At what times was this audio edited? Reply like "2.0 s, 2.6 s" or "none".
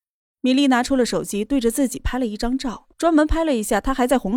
2.9 s

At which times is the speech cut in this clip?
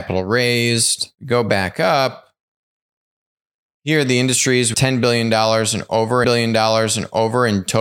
4.7 s, 6.2 s

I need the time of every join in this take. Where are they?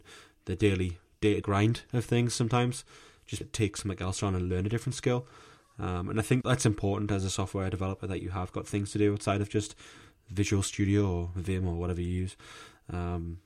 1.4 s, 3.4 s, 6.4 s

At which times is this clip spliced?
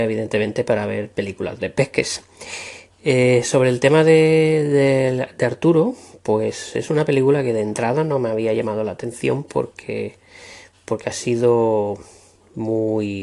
none

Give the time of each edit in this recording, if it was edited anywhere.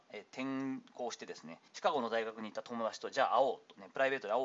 1.7 s

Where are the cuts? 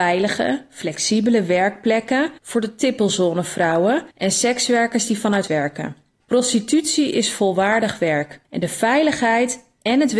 2.4 s, 4.1 s, 5.5 s, 6.2 s, 8.4 s

